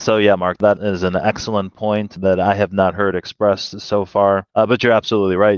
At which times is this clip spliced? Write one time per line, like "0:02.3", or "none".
0:04.5